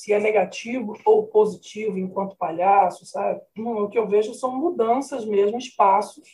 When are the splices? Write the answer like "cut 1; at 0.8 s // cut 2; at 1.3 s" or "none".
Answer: cut 1; at 3.5 s